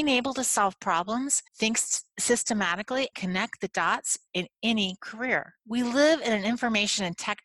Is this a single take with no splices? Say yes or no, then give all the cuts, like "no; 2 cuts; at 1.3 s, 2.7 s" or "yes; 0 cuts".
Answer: no; 4 cuts; at 1.5 s, 3.1 s, 4.3 s, 5.6 s